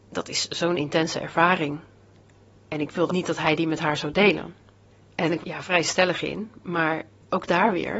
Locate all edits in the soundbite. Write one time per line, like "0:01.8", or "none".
0:03.1
0:04.9
0:05.4